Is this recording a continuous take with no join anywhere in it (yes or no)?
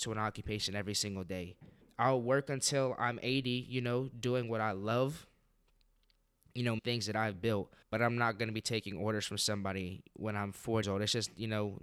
no